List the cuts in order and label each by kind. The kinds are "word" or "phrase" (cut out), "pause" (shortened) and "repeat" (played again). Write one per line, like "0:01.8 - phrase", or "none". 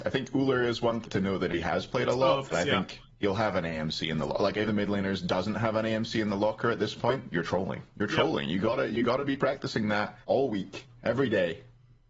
0:01.0 - word
0:02.5 - word
0:03.1 - pause
0:04.7 - phrase
0:07.2 - word
0:10.2 - pause